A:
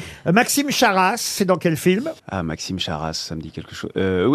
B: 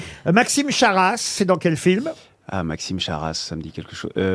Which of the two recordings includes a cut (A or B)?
A